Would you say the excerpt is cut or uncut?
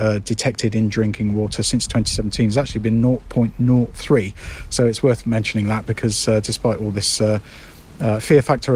uncut